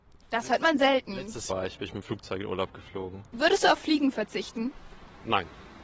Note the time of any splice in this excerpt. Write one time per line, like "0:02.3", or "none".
0:01.5